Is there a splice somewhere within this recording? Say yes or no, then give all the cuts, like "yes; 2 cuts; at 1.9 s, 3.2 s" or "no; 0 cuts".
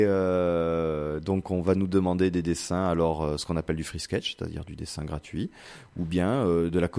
no; 0 cuts